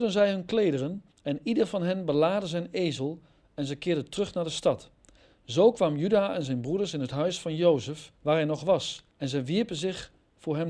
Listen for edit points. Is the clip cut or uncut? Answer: cut